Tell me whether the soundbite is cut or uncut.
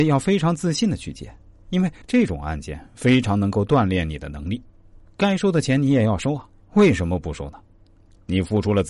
cut